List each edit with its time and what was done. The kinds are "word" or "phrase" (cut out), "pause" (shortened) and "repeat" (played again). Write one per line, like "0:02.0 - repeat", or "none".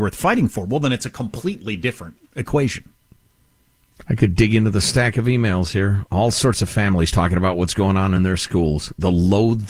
none